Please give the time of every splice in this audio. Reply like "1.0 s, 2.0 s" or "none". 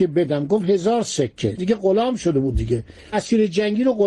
1.6 s, 3.1 s